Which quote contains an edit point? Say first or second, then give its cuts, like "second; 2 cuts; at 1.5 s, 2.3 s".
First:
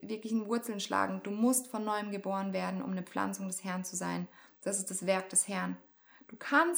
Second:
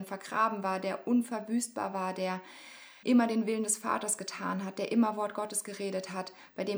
second; 1 cut; at 3.0 s